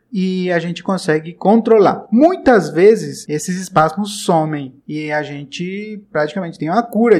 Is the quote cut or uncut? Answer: cut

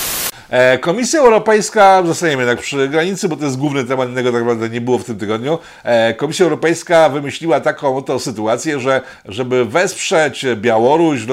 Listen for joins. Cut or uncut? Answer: uncut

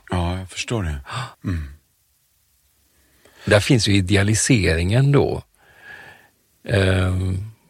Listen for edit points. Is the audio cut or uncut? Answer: cut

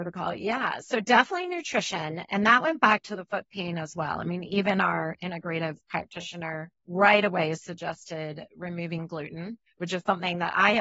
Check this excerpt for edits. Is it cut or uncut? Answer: cut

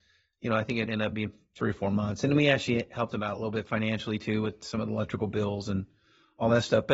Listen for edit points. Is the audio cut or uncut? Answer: uncut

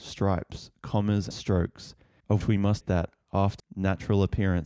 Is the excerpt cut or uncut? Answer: cut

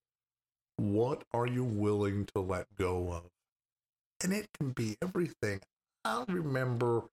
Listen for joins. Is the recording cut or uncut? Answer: uncut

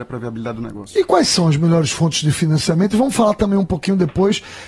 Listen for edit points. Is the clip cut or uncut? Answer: uncut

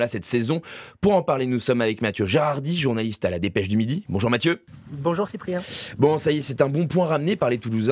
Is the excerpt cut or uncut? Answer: uncut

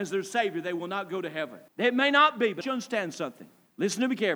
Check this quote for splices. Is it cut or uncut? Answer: cut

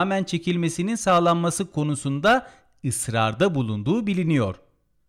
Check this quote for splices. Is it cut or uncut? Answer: uncut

